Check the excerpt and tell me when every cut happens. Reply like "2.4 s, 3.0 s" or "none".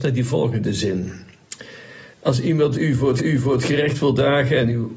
2.1 s, 3.2 s